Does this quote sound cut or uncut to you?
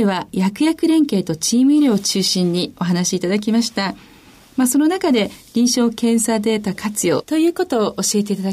uncut